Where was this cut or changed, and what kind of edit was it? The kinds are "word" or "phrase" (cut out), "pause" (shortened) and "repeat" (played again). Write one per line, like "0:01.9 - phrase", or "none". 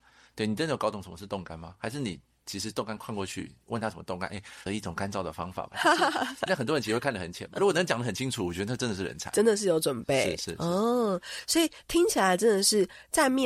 0:04.7 - word
0:06.5 - phrase
0:07.6 - word